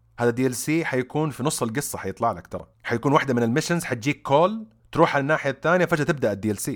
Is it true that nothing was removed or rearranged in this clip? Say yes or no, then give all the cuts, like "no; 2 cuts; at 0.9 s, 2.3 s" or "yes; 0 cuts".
no; 2 cuts; at 2.7 s, 4.8 s